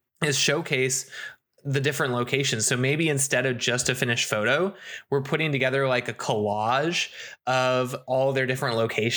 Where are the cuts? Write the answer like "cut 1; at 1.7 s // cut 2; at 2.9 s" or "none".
none